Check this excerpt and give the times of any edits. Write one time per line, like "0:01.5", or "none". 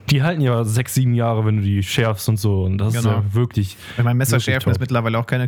none